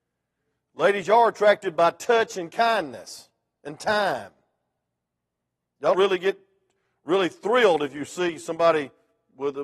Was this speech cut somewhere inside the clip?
yes; 1 cut; at 5.9 s

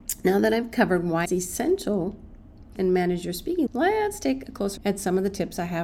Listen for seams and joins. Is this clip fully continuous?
no; 4 cuts; at 1.2 s, 2.7 s, 3.7 s, 4.8 s

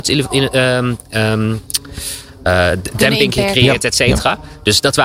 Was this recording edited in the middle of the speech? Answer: no; 0 cuts

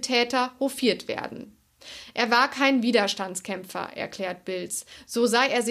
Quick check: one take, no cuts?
yes; 0 cuts

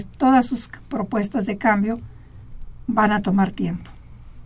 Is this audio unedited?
yes; 0 cuts

